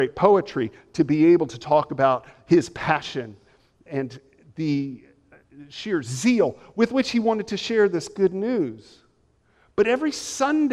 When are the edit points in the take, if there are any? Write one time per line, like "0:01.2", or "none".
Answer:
none